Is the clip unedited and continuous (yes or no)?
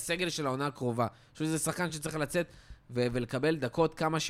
yes